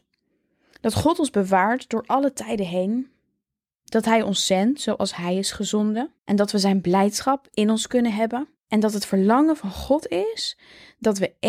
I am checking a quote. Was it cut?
yes; 2 cuts; at 6.2 s, 8.6 s

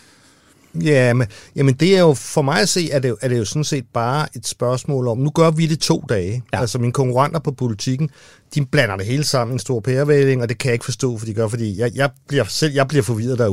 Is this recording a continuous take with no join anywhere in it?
yes; 0 cuts

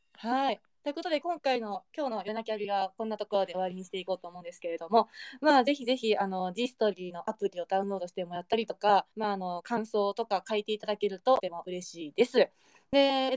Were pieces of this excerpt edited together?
yes; 1 cut; at 9.1 s

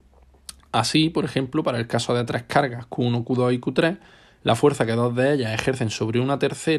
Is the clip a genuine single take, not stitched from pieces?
yes; 0 cuts

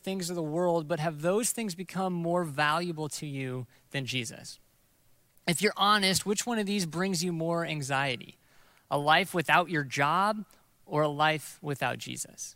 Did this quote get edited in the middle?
no; 0 cuts

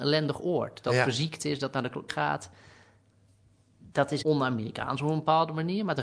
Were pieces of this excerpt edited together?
yes; 2 cuts; at 2.1 s, 4.2 s

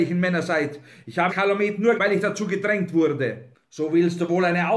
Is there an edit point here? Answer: yes; 2 cuts; at 1.3 s, 2.0 s

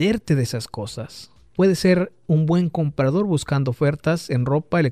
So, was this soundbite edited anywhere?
no; 0 cuts

